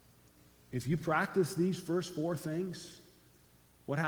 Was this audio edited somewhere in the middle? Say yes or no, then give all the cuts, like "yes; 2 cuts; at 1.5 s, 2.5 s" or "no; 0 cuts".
no; 0 cuts